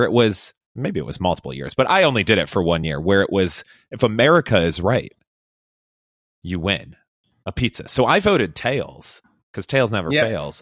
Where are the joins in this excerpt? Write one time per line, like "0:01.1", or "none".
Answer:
none